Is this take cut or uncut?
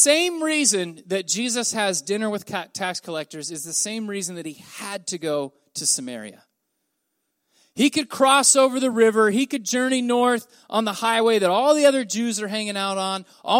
uncut